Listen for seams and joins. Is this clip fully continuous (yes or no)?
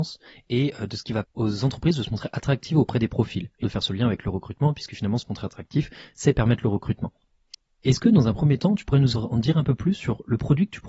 no